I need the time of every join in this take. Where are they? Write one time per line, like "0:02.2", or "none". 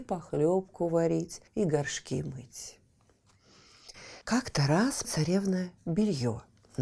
0:01.5
0:04.2
0:05.0